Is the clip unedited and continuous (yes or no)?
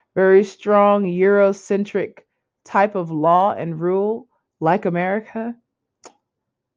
yes